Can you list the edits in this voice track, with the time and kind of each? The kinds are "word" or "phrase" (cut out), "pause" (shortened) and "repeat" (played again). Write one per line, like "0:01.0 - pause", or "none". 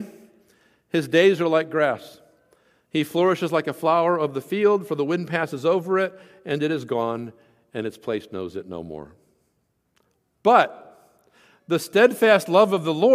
none